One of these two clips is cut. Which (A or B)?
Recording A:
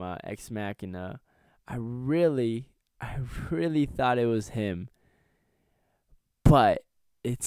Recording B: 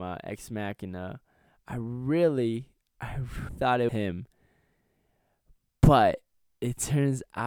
B